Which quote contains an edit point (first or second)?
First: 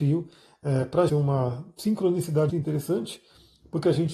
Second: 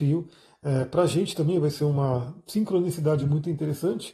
first